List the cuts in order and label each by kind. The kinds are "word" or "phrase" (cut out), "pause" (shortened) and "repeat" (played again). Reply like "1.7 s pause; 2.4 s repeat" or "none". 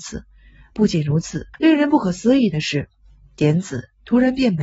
1.5 s pause